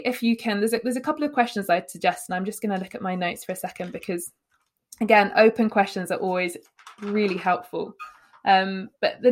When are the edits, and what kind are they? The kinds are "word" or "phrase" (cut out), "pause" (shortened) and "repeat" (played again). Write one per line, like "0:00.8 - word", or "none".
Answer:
none